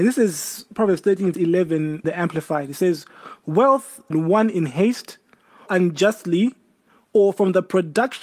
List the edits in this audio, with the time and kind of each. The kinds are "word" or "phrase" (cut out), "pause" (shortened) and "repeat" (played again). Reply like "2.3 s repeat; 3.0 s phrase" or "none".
1.3 s word; 2.0 s word; 4.1 s phrase; 5.7 s word